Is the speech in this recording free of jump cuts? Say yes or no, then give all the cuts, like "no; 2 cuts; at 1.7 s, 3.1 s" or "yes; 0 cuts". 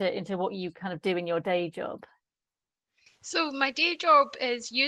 yes; 0 cuts